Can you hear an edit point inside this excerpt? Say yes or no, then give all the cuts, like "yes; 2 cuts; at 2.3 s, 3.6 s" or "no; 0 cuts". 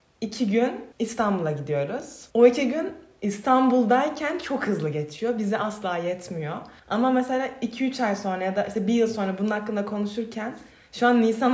yes; 3 cuts; at 0.9 s, 2.3 s, 6.8 s